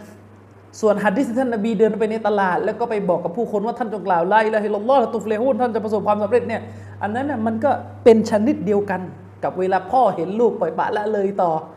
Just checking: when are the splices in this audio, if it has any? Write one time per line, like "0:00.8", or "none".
none